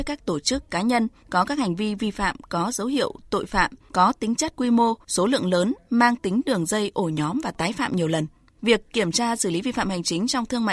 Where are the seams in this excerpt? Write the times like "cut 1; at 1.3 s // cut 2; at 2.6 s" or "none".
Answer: none